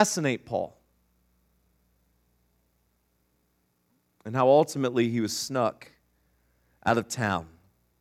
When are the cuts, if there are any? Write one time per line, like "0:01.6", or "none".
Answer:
none

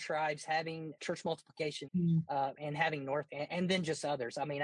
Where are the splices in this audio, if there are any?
0:01.0
0:01.9
0:03.3

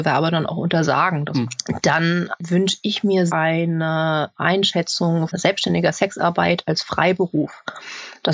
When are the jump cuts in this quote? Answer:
0:03.3
0:05.3

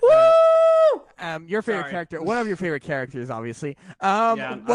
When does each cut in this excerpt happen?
none

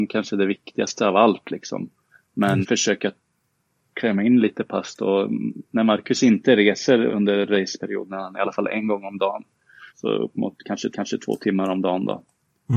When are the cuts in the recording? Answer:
0:02.6
0:07.1
0:08.3
0:09.9
0:10.9

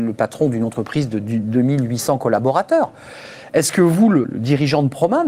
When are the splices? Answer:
0:04.2

